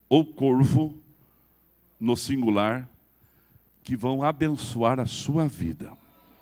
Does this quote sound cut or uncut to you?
uncut